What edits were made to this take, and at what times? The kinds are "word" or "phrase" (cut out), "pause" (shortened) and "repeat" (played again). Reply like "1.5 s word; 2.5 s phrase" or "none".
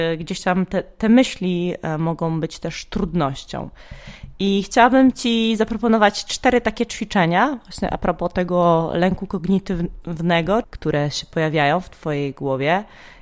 10.6 s phrase